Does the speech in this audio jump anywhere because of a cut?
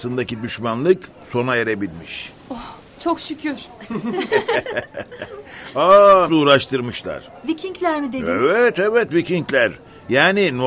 yes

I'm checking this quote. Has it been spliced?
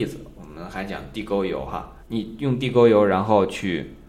yes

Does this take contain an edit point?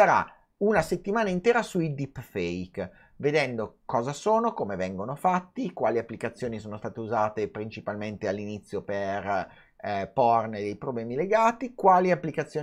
no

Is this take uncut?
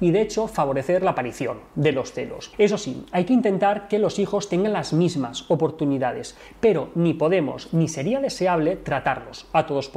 yes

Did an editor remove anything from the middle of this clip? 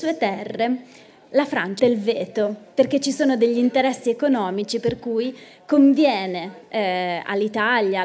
yes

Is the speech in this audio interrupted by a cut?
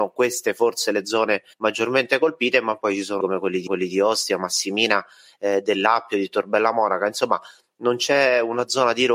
yes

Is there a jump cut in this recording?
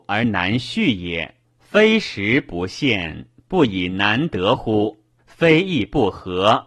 yes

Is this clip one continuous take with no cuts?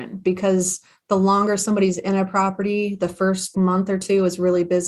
no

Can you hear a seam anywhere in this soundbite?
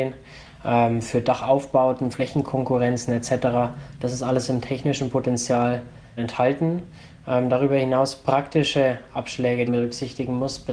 yes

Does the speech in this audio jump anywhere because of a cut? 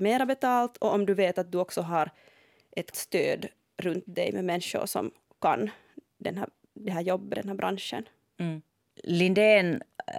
yes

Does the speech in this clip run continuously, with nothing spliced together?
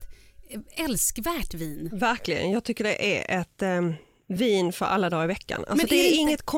yes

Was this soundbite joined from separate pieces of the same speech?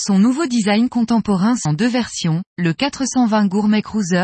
yes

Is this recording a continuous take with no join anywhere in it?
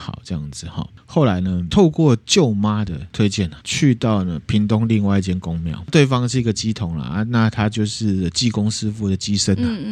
no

